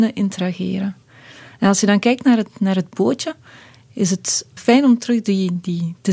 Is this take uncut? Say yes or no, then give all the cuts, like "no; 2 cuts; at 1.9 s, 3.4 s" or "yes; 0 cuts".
no; 1 cut; at 4.6 s